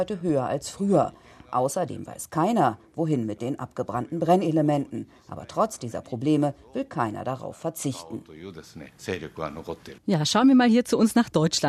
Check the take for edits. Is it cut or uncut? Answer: cut